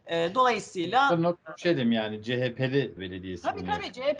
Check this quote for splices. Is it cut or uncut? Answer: cut